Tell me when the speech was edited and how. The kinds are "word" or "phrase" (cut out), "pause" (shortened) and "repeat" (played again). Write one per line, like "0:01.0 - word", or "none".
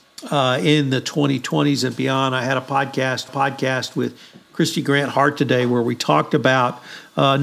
0:03.3 - repeat